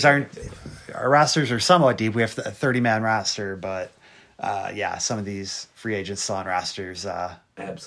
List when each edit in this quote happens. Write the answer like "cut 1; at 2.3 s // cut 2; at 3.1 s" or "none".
cut 1; at 5.7 s